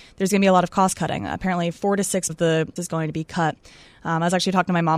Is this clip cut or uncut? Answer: cut